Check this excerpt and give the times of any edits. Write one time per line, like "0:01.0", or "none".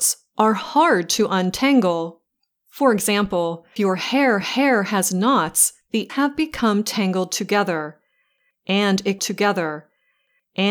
0:02.4
0:03.8
0:04.4
0:06.1
0:09.2